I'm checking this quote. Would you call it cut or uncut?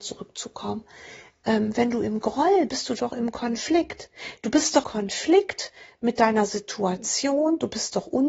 cut